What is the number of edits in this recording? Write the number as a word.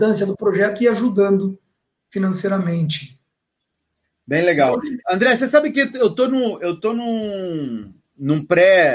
one